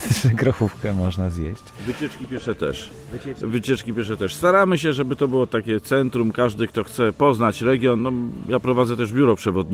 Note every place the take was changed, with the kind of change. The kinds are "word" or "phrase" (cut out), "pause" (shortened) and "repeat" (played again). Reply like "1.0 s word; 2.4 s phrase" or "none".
none